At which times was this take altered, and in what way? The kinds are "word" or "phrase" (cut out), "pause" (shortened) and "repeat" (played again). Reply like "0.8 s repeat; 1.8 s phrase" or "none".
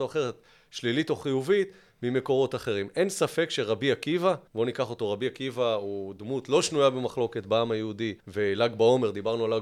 4.5 s pause; 8.2 s pause